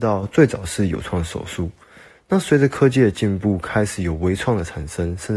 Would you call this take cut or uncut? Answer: uncut